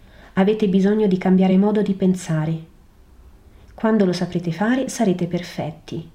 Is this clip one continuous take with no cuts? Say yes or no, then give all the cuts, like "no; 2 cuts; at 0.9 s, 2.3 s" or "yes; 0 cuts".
yes; 0 cuts